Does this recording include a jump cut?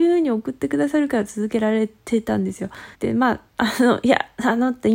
yes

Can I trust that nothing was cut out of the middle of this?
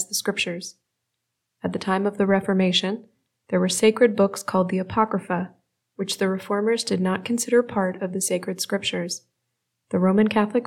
yes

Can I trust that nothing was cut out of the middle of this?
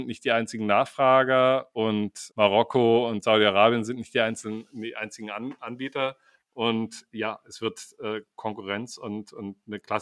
no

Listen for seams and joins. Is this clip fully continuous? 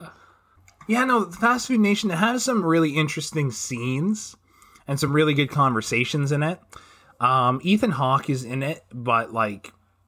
yes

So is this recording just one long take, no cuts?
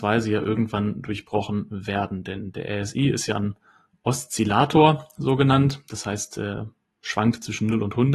yes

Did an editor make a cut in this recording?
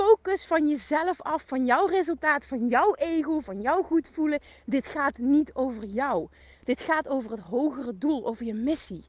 no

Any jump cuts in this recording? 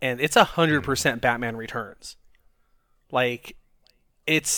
no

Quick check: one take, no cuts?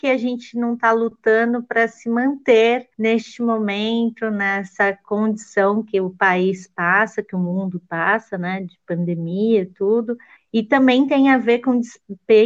no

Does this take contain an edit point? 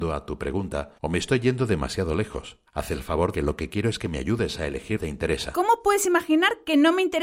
yes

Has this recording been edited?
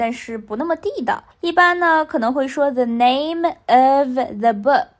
yes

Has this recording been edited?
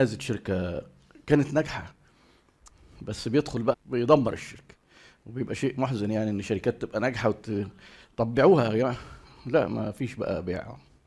yes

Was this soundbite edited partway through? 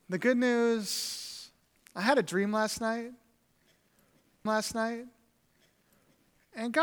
yes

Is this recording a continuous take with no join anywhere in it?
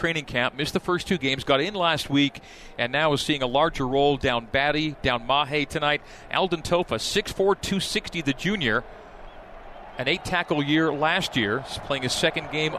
yes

